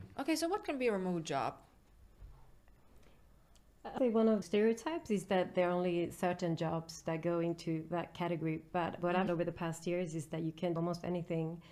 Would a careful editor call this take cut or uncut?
cut